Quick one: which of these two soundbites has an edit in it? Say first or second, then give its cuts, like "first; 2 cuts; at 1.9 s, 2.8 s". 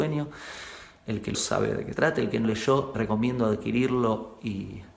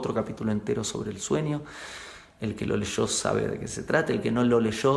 first; 4 cuts; at 1.3 s, 1.9 s, 2.4 s, 2.9 s